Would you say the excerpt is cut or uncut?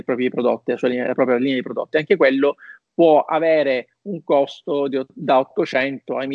uncut